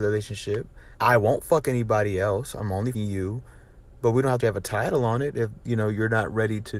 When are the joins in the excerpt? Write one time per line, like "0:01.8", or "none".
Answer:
0:00.9
0:02.9
0:04.4

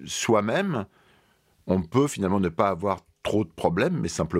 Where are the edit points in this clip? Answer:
none

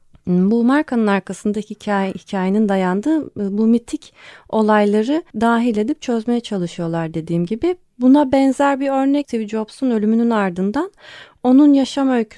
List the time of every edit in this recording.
0:05.3

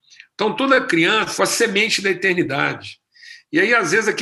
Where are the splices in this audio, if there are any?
0:01.4

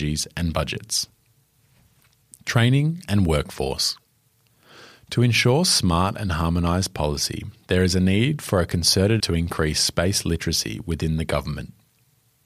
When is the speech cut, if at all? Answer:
0:09.2

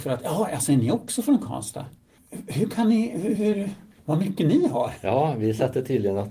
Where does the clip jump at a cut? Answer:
none

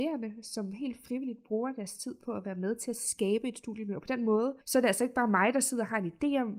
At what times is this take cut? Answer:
0:04.6

